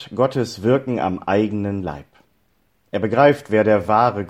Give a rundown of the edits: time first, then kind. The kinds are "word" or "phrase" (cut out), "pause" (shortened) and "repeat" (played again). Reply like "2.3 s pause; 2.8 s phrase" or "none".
none